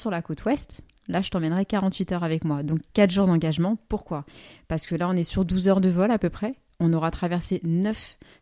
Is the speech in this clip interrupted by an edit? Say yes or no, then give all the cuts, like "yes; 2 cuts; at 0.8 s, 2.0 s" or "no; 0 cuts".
no; 0 cuts